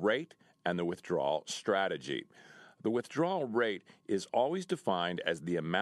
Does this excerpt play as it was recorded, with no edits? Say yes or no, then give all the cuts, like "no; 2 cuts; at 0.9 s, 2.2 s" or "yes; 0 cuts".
yes; 0 cuts